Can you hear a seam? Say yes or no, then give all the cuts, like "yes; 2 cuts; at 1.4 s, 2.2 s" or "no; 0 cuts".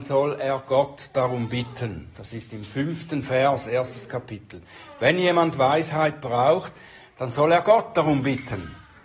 no; 0 cuts